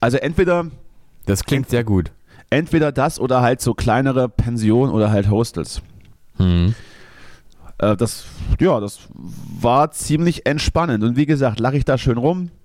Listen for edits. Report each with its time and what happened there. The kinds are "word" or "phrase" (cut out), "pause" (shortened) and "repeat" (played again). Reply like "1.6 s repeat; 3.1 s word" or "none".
none

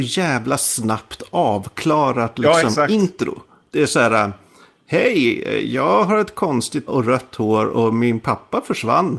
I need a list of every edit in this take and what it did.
6.9 s word

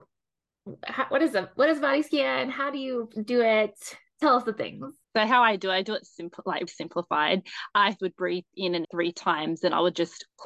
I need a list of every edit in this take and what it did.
5.0 s pause; 6.7 s word; 8.0 s word; 8.8 s word

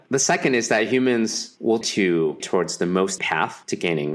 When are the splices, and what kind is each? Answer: 1.8 s word; 2.4 s word; 3.2 s word

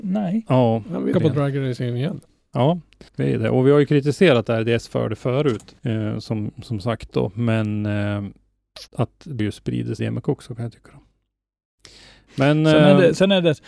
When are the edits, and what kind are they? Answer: 1.1 s phrase; 3.1 s pause; 5.8 s pause; 8.9 s pause; 9.4 s word; 10.0 s phrase

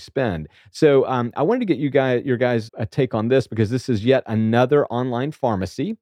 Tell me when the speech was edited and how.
2.7 s word

